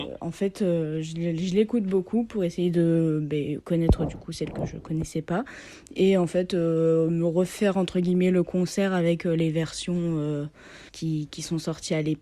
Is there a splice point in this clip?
yes; 1 cut; at 10.9 s

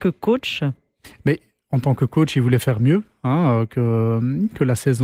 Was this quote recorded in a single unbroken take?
yes; 0 cuts

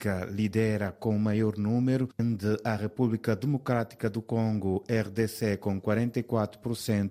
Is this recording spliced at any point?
no; 0 cuts

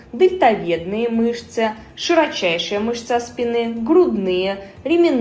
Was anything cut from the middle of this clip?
no; 0 cuts

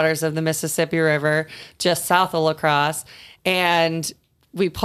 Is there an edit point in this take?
no; 0 cuts

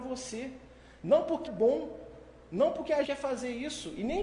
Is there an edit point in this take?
yes; 2 cuts; at 1.5 s, 3.0 s

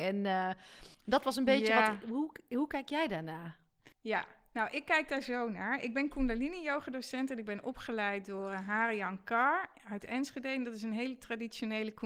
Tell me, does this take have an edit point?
yes; 2 cuts; at 0.9 s, 3.9 s

